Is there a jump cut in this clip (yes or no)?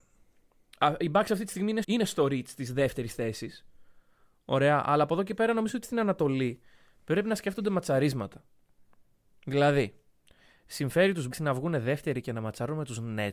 yes